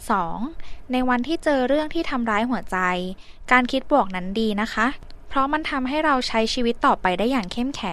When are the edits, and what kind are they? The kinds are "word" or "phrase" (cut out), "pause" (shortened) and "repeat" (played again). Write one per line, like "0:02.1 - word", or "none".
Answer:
none